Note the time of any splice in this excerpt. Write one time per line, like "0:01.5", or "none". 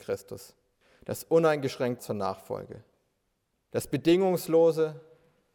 0:02.0